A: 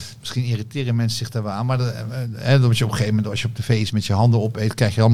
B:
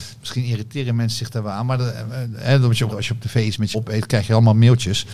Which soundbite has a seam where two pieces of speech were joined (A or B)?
B